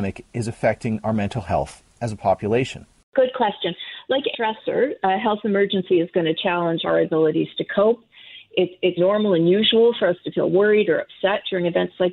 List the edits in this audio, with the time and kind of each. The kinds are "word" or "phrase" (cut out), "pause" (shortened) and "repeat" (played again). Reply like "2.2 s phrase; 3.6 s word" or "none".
4.3 s word; 6.8 s word; 9.0 s word